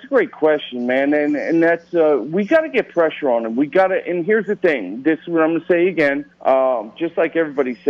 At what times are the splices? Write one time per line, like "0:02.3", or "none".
0:06.3